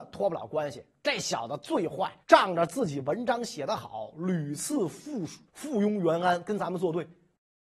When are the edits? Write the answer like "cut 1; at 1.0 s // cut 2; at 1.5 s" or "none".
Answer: cut 1; at 2.2 s // cut 2; at 5.5 s

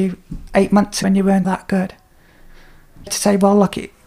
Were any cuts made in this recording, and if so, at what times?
cut 1; at 1.0 s // cut 2; at 1.4 s // cut 3; at 3.1 s

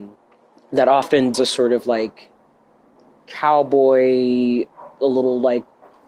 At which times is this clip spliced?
cut 1; at 1.3 s

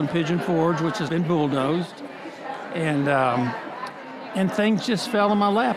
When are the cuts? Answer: cut 1; at 1.1 s

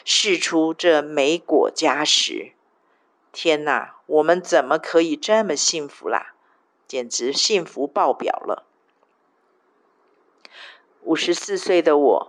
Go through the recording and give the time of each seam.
none

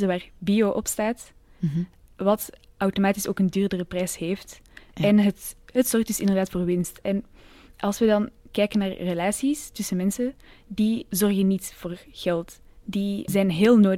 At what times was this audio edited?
none

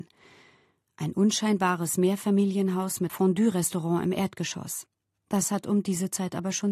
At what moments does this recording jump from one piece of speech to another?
cut 1; at 3.1 s

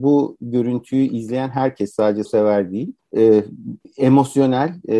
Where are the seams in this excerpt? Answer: cut 1; at 2.3 s

